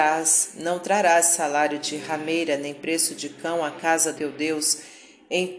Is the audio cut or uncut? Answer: cut